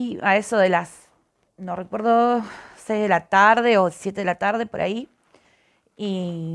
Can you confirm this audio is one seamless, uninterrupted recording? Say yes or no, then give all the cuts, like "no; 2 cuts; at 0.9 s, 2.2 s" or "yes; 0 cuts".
yes; 0 cuts